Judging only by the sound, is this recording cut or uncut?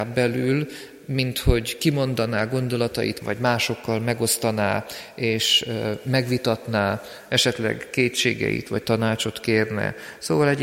cut